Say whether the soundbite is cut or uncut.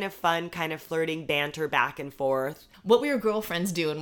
uncut